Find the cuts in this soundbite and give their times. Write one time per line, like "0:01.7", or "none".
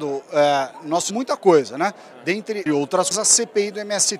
0:01.1
0:02.7
0:03.1